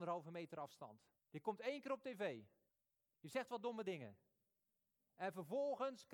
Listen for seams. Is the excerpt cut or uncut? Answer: cut